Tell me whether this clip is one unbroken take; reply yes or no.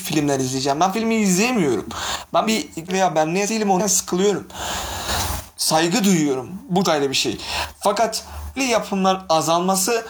no